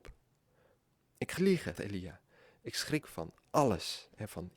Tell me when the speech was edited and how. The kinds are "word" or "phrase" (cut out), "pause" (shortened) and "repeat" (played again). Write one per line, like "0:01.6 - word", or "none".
0:01.4 - word
0:01.8 - word
0:03.0 - word